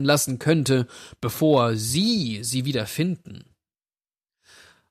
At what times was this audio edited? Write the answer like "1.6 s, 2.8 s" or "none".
none

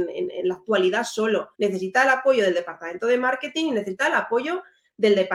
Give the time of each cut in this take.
1.5 s

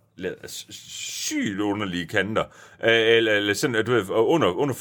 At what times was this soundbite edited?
none

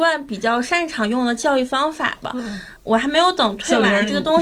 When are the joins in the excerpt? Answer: 2.8 s

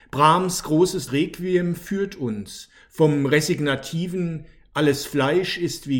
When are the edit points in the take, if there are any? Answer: 1.1 s

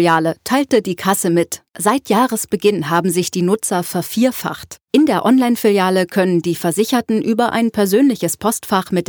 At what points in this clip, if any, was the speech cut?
1.7 s, 4.8 s

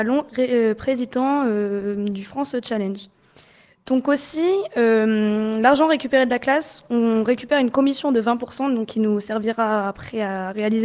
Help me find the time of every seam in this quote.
none

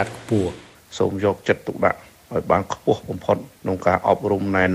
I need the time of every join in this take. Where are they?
3.5 s

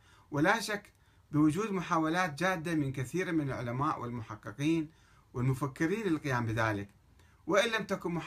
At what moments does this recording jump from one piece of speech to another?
none

